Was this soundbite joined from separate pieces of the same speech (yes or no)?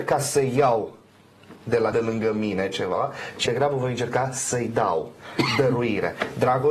yes